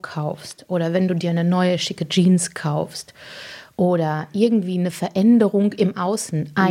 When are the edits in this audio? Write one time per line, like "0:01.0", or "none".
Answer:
none

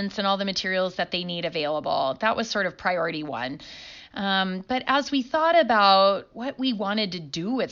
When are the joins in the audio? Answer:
none

